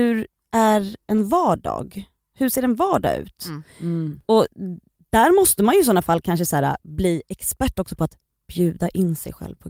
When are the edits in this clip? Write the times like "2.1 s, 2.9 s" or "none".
none

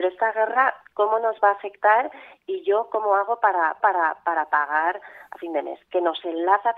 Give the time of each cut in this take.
3.8 s

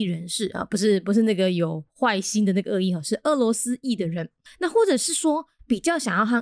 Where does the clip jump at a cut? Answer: 4.5 s

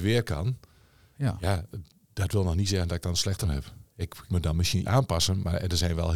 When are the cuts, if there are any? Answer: 3.4 s, 4.3 s, 4.8 s

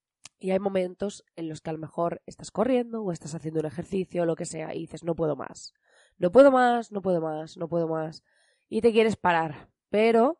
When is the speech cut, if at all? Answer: none

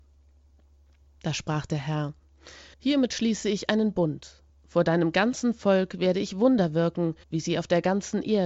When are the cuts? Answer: 2.7 s, 4.5 s, 7.2 s

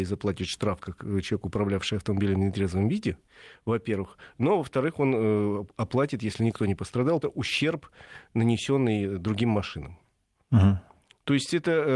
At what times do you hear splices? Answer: 7.2 s

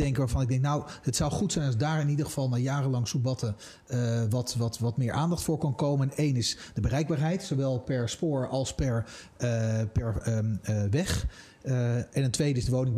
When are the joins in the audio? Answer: none

